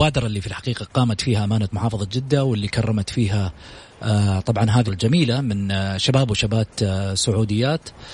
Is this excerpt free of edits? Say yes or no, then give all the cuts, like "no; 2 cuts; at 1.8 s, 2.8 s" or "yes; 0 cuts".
no; 1 cut; at 4.9 s